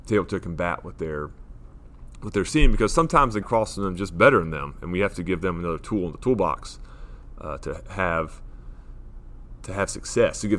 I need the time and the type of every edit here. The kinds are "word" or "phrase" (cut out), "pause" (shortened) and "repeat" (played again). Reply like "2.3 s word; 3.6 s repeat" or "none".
3.4 s word